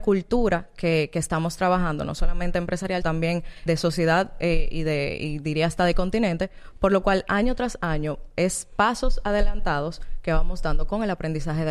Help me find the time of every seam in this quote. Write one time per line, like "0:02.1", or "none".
0:03.0
0:03.7